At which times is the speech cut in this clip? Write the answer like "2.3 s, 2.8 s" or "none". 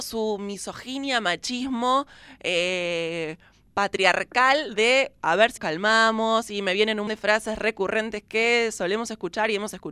5.6 s, 7.1 s